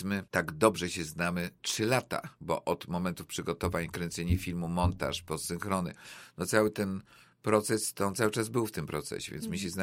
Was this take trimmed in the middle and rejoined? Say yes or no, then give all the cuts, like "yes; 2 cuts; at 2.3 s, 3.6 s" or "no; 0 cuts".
no; 0 cuts